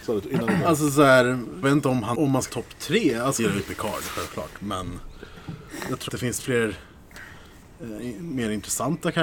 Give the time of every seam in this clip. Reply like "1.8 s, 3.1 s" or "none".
1.6 s, 2.1 s, 2.5 s, 3.4 s, 6.1 s, 6.4 s